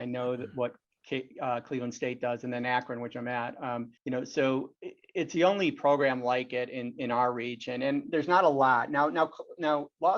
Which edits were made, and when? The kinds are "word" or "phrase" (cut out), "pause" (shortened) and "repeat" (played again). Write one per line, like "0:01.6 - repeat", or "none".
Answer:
0:04.0 - pause